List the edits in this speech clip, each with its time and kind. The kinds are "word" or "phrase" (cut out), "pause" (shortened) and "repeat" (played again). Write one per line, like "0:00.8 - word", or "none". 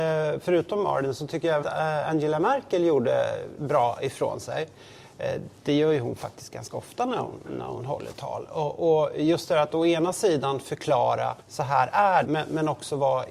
0:01.6 - word
0:11.4 - pause
0:12.2 - word